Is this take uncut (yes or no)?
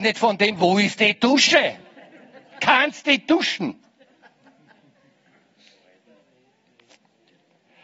yes